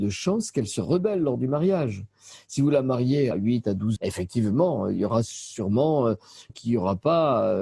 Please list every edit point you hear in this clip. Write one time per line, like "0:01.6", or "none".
0:03.3
0:04.0
0:06.5

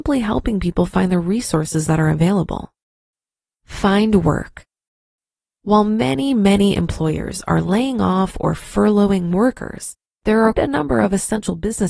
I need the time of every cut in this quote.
0:10.5

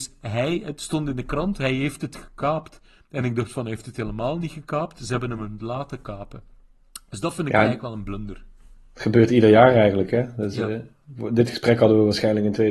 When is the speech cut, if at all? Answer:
none

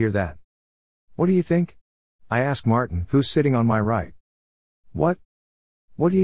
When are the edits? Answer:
none

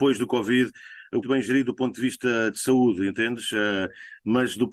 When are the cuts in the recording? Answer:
0:01.2

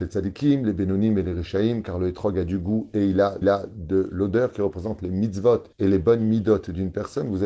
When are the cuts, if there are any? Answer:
0:03.4
0:05.7

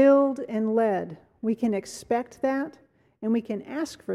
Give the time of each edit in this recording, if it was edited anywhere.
none

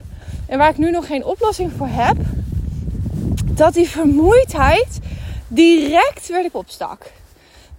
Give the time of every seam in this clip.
0:06.5

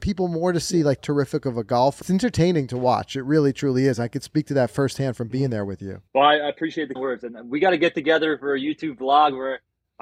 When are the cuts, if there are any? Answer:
0:01.0
0:02.0
0:06.1
0:07.0

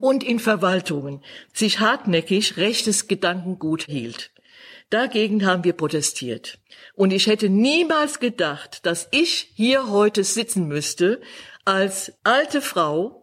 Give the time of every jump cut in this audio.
none

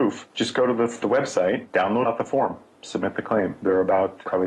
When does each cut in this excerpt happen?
0:02.0

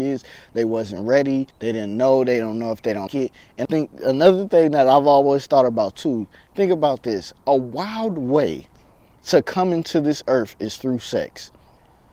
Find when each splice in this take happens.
0:01.5
0:03.1
0:03.6

